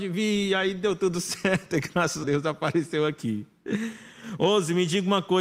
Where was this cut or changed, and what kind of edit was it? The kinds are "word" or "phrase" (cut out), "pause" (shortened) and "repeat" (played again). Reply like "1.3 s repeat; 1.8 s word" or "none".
2.2 s word